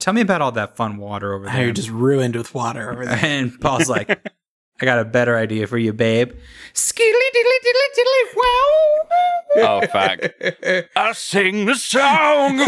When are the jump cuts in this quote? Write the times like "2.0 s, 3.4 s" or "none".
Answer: none